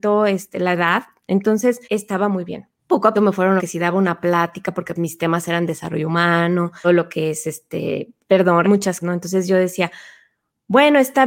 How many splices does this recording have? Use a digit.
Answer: 8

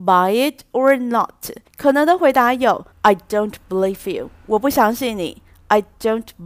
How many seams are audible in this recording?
2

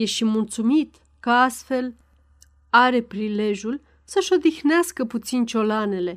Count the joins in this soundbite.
0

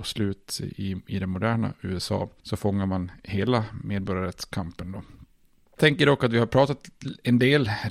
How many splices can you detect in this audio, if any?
0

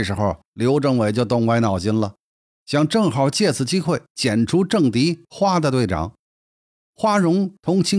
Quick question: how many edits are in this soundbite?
0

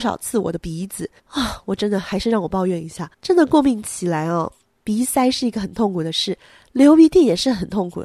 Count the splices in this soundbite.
2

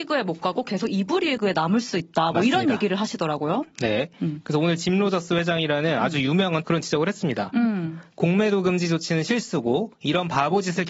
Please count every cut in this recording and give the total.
1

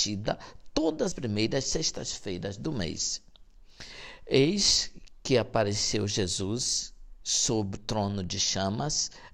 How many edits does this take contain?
2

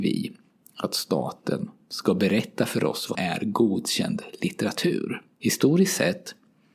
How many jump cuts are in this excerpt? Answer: 2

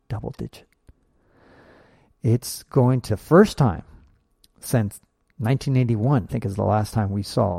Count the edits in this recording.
2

